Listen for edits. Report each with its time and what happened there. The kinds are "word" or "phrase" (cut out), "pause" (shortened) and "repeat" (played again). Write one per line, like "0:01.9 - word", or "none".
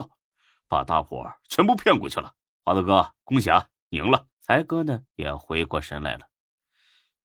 0:02.4 - pause
0:04.3 - pause
0:05.1 - pause